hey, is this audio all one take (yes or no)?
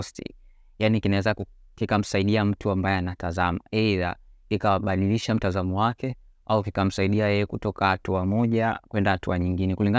yes